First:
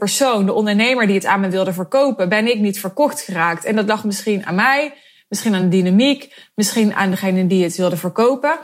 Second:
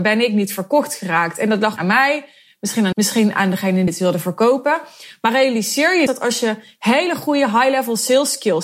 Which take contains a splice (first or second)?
second